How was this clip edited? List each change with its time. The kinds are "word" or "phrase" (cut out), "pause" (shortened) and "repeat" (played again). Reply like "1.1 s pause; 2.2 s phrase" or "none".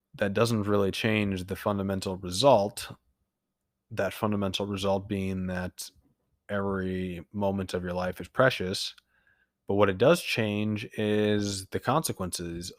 none